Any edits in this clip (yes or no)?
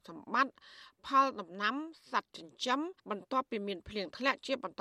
yes